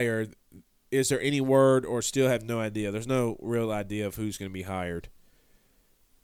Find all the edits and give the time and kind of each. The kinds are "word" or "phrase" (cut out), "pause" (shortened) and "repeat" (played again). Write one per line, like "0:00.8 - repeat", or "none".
none